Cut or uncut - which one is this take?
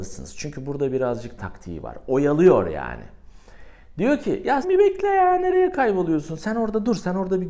cut